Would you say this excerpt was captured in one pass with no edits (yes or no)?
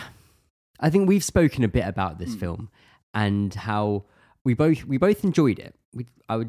yes